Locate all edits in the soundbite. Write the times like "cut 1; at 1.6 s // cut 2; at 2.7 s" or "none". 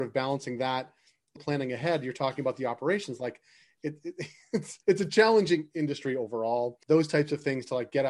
cut 1; at 1.4 s // cut 2; at 4.8 s // cut 3; at 6.8 s